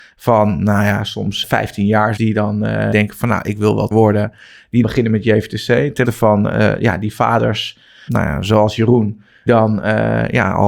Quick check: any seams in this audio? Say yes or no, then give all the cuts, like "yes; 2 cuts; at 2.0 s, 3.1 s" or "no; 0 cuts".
yes; 8 cuts; at 1.4 s, 2.2 s, 2.9 s, 3.9 s, 4.8 s, 6.0 s, 8.1 s, 9.5 s